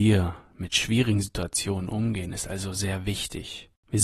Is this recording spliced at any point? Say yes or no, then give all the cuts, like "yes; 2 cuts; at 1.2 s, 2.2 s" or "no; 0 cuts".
no; 0 cuts